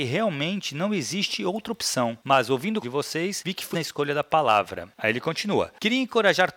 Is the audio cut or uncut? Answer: cut